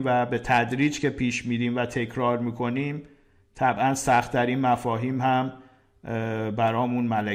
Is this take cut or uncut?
uncut